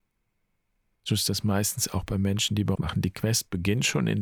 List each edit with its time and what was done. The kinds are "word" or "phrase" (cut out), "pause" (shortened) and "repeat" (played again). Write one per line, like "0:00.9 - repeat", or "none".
0:02.7 - phrase